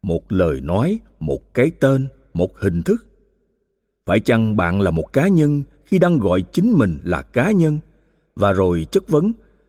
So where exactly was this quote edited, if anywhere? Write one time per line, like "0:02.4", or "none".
none